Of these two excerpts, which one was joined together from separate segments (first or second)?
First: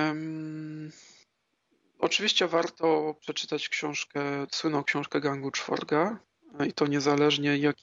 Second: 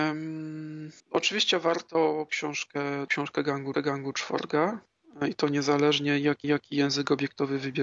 second